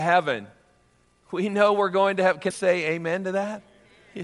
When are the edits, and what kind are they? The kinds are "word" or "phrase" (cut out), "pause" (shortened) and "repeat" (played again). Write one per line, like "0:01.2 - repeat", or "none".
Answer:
0:02.5 - word

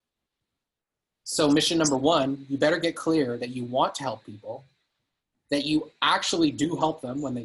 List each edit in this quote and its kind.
none

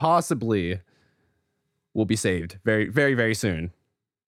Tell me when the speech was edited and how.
none

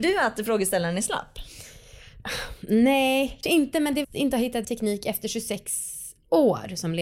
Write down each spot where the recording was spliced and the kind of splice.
0:03.4 - word
0:04.0 - phrase
0:04.6 - word

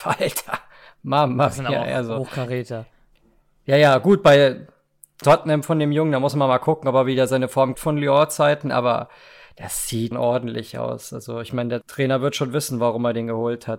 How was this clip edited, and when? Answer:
0:05.2 - word
0:07.7 - word
0:10.1 - word
0:11.8 - word

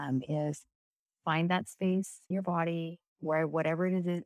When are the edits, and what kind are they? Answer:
0:02.3 - word

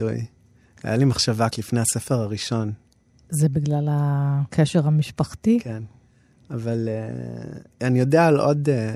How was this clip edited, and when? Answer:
0:01.5 - word

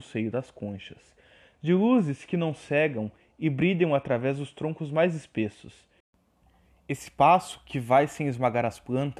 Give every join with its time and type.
none

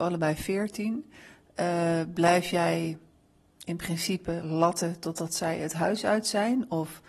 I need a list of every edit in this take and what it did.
none

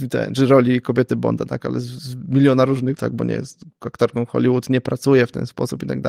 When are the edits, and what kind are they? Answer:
0:03.0 - word

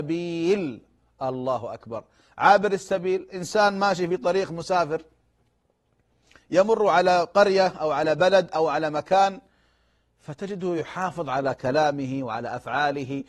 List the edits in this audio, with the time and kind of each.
none

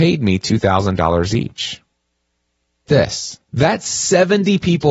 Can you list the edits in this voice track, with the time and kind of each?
0:02.9 - word
0:03.5 - pause

